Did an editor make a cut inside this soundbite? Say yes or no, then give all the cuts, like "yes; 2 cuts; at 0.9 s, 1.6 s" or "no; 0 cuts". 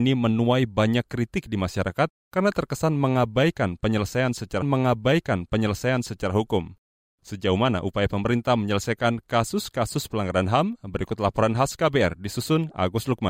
yes; 2 cuts; at 2.2 s, 4.6 s